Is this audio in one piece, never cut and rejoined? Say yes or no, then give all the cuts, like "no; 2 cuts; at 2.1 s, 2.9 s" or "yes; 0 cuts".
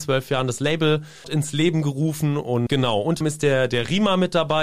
no; 3 cuts; at 1.2 s, 2.7 s, 3.2 s